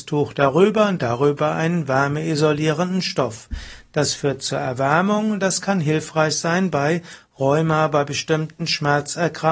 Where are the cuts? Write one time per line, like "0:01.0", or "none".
none

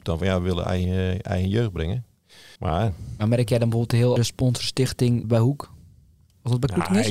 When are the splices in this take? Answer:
0:02.6
0:04.2
0:05.2

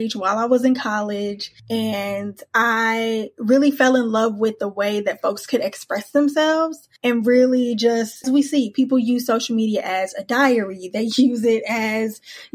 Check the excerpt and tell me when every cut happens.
0:01.6
0:07.0
0:08.2

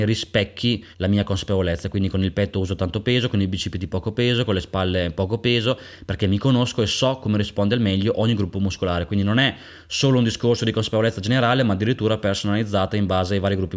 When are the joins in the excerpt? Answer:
0:00.9

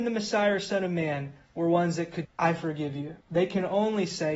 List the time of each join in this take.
0:02.2
0:03.2

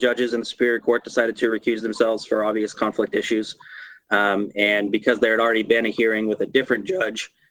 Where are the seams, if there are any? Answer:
none

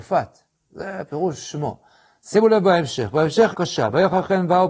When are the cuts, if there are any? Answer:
0:03.5

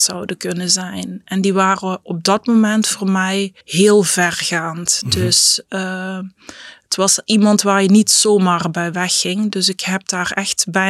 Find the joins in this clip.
0:03.6

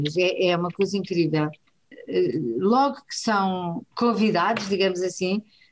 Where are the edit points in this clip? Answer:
0:03.9

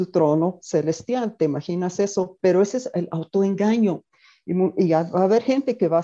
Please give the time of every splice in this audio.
none

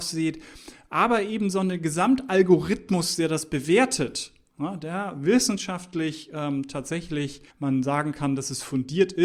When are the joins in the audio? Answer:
0:07.5

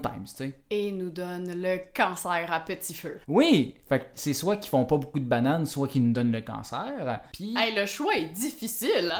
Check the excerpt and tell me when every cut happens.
0:03.2

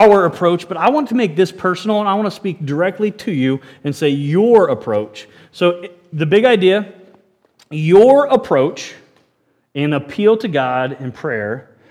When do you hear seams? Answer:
none

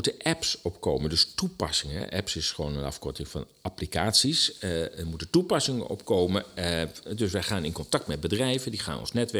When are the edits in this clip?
none

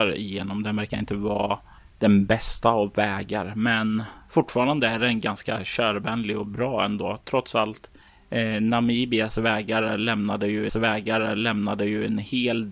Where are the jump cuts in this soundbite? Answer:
0:10.7

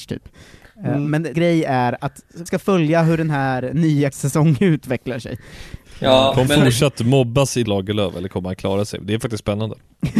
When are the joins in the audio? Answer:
0:01.3
0:02.5
0:04.1
0:06.5
0:07.7

